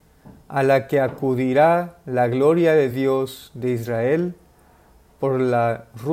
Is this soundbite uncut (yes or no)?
yes